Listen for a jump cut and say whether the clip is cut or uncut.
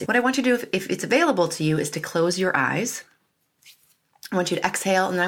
uncut